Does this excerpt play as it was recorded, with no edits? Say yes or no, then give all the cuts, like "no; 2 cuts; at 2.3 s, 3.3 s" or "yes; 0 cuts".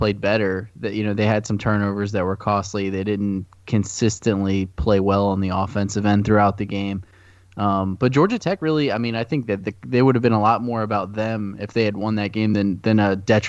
yes; 0 cuts